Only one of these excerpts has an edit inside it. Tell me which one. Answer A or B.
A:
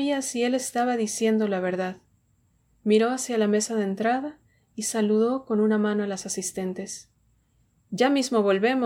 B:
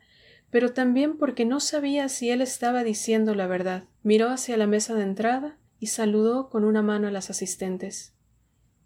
B